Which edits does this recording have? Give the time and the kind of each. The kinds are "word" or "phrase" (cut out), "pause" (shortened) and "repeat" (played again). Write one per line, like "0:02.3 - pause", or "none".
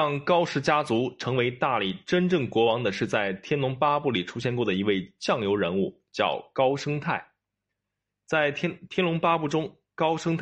none